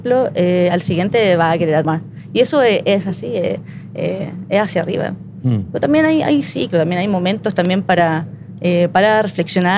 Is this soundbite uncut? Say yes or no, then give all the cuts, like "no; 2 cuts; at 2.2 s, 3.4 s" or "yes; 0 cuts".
no; 1 cut; at 1.8 s